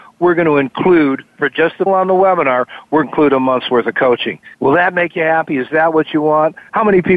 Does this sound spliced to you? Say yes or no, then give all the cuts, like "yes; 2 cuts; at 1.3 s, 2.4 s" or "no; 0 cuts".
yes; 4 cuts; at 1.3 s, 1.9 s, 3.0 s, 4.5 s